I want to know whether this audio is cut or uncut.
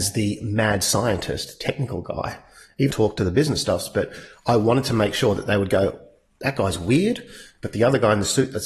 cut